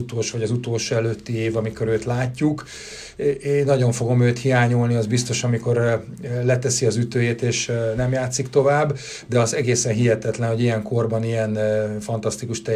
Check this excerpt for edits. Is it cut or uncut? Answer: uncut